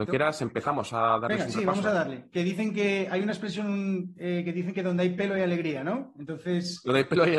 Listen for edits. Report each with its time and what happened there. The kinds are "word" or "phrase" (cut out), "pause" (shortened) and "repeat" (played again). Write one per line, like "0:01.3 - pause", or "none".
none